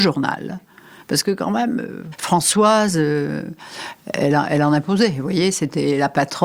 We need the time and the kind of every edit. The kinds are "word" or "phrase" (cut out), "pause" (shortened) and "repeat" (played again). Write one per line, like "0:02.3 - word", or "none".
none

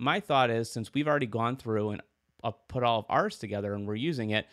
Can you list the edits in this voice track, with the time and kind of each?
none

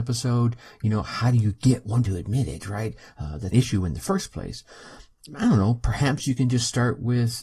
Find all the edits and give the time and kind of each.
0:02.0 - word
0:03.5 - phrase

